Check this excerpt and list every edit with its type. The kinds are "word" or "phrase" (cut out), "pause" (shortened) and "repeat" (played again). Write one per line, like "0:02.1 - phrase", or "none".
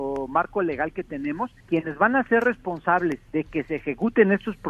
0:01.6 - pause
0:03.3 - pause